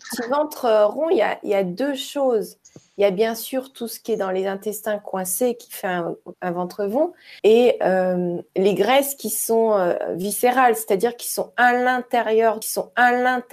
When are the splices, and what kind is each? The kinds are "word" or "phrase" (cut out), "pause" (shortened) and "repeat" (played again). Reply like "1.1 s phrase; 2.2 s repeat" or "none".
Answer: 6.3 s word; 7.4 s pause; 12.6 s repeat